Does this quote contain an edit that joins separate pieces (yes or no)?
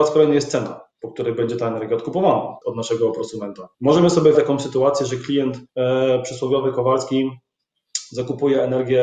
yes